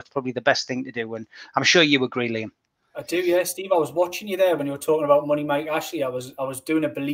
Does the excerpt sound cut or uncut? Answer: uncut